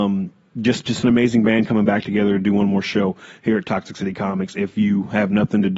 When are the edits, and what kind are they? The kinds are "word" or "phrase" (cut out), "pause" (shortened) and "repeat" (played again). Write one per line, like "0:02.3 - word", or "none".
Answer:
none